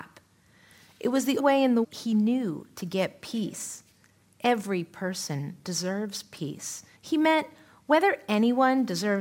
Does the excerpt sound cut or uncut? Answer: cut